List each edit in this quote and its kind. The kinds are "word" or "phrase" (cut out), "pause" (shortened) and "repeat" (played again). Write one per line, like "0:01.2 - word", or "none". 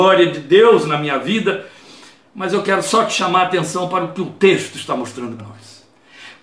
0:05.4 - word

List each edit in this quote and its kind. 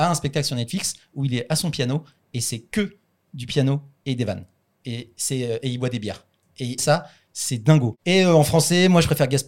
0:06.8 - phrase

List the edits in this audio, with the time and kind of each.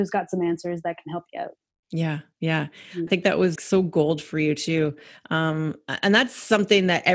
0:03.1 - word
0:03.6 - word

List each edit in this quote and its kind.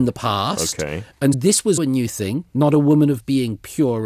0:01.3 - word
0:01.8 - word

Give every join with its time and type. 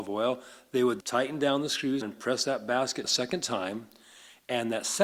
0:01.0 - word
0:02.0 - word
0:03.0 - word

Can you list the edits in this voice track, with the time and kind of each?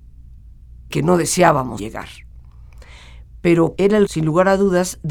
0:00.9 - word
0:01.8 - word
0:03.8 - word
0:04.1 - word

